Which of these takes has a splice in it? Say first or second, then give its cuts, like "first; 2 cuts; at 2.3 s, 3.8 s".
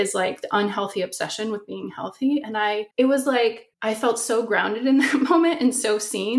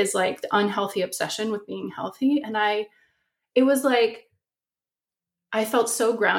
first; 2 cuts; at 2.9 s, 3.7 s